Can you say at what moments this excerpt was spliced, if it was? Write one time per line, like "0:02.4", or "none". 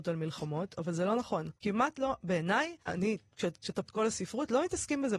0:01.6
0:02.8
0:03.8

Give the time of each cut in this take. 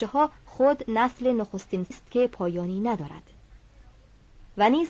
0:01.9

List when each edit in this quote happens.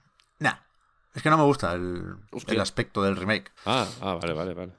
0:02.3
0:03.6

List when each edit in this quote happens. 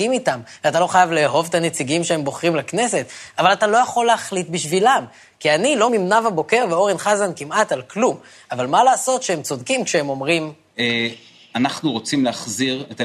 0:05.9

